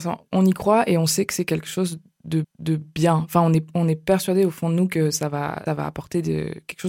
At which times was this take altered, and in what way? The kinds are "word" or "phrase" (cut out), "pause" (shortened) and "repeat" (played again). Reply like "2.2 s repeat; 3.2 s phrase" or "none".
2.4 s repeat; 5.7 s word